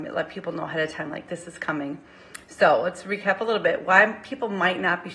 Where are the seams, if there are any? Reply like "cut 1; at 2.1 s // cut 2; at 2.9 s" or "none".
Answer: none